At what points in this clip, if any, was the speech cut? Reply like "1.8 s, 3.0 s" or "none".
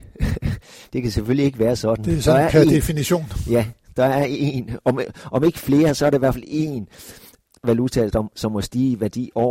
none